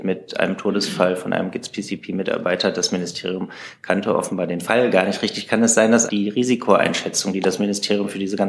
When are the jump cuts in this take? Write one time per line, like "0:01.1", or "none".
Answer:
0:06.1